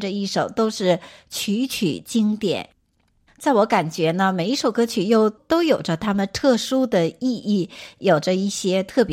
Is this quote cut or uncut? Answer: uncut